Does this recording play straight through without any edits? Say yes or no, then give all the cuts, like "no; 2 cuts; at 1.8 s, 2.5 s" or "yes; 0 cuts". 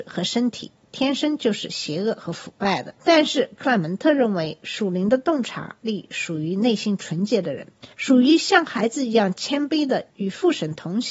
no; 2 cuts; at 3.0 s, 7.9 s